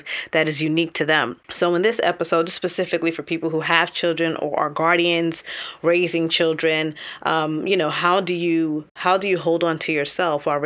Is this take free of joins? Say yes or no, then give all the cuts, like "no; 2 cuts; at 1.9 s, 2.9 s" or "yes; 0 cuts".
no; 2 cuts; at 1.4 s, 8.9 s